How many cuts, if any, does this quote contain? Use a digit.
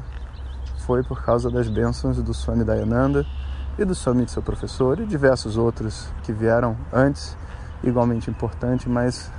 2